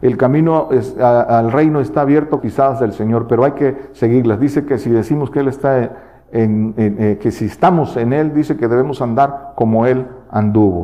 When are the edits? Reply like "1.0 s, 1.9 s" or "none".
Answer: 2.4 s